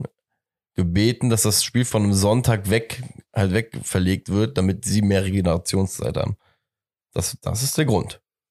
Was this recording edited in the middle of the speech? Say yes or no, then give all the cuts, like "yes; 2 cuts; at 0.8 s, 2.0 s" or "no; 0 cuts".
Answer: no; 0 cuts